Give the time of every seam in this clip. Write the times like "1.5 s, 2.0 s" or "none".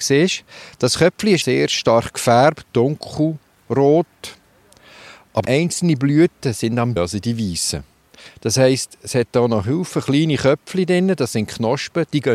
1.4 s, 2.6 s, 5.4 s, 7.0 s